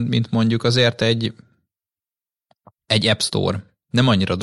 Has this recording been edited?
no; 0 cuts

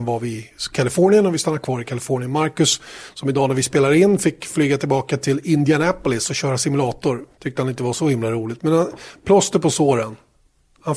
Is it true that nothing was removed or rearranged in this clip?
no; 1 cut; at 7.3 s

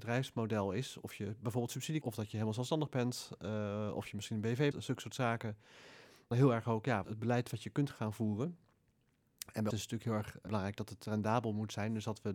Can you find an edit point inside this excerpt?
yes; 6 cuts; at 2.0 s, 4.7 s, 6.3 s, 7.0 s, 9.7 s, 10.5 s

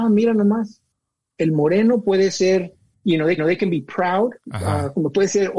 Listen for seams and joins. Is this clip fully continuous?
no; 1 cut; at 3.4 s

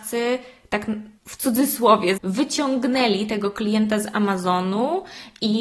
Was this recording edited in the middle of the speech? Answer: yes; 2 cuts; at 1.2 s, 2.2 s

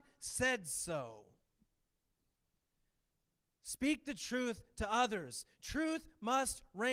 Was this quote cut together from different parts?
no; 0 cuts

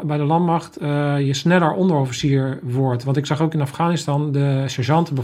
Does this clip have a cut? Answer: no; 0 cuts

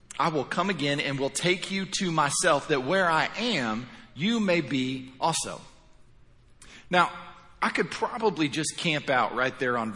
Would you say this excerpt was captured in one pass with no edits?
yes; 0 cuts

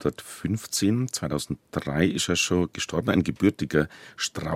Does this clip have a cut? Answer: no; 0 cuts

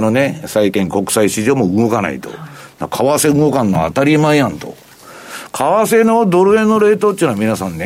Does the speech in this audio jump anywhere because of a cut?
no; 0 cuts

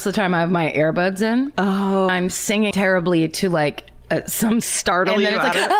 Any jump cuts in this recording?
yes; 3 cuts; at 2.1 s, 2.7 s, 4.6 s

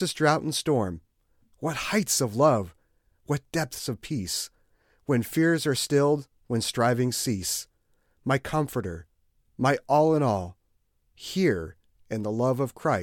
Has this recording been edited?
no; 0 cuts

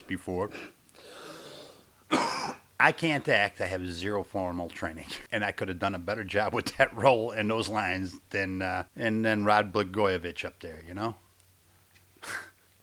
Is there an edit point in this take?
yes; 2 cuts; at 5.3 s, 8.9 s

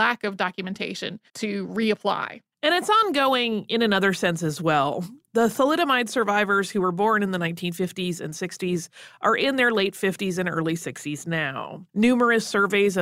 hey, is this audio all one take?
no; 2 cuts; at 1.3 s, 11.9 s

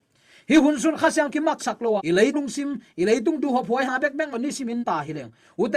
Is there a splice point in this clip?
yes; 7 cuts; at 1.3 s, 1.6 s, 2.0 s, 2.3 s, 3.8 s, 4.3 s, 4.8 s

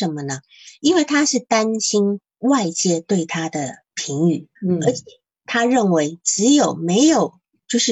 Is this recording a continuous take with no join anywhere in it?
no; 2 cuts; at 3.8 s, 4.6 s

